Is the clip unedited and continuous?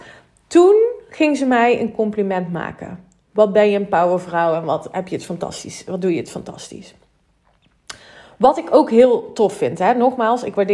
yes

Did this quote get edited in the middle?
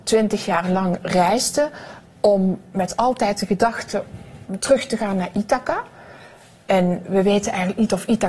no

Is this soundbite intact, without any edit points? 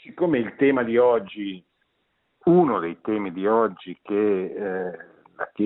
yes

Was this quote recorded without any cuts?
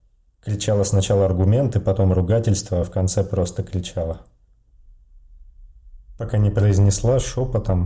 yes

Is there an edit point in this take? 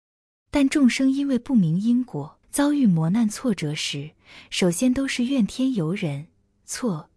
yes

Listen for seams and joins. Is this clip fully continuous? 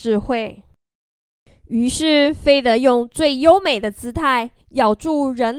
no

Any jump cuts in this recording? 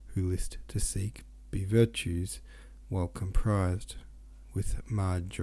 no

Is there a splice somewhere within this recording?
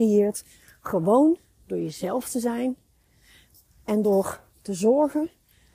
no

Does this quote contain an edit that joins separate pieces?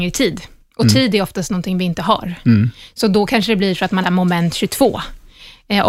yes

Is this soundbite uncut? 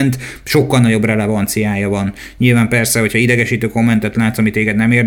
yes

